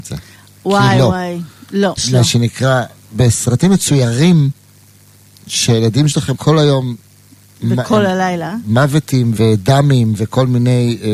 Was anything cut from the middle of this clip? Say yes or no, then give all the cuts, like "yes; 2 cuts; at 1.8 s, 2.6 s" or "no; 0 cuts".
yes; 3 cuts; at 2.0 s, 6.3 s, 9.4 s